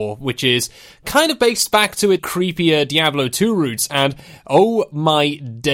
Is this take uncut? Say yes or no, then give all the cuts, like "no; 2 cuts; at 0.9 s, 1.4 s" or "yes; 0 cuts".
no; 1 cut; at 2.2 s